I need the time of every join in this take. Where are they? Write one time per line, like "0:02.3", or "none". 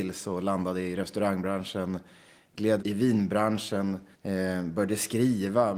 0:02.8
0:04.1